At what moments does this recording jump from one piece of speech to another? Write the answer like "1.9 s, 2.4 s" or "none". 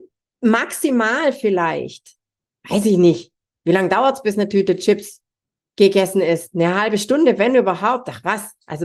none

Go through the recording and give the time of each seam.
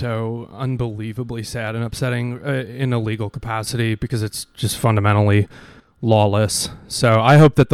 none

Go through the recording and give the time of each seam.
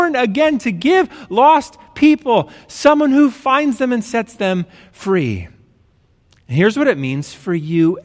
none

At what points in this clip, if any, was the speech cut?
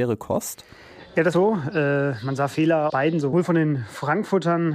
1.3 s, 2.9 s, 3.2 s

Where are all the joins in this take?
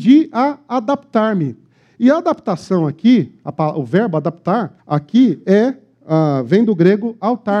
4.8 s

